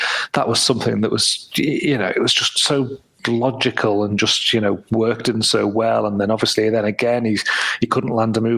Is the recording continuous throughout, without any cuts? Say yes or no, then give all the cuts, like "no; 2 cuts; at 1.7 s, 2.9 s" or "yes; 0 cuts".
yes; 0 cuts